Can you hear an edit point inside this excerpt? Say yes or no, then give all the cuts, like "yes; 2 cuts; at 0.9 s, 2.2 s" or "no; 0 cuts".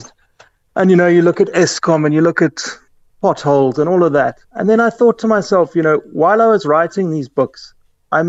yes; 2 cuts; at 2.9 s, 4.4 s